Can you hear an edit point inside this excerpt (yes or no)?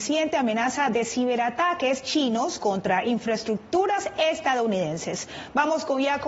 no